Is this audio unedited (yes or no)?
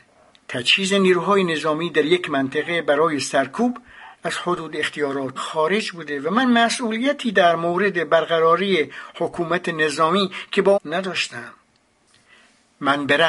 no